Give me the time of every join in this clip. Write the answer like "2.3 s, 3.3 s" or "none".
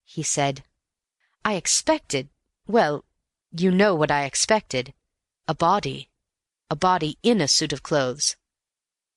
none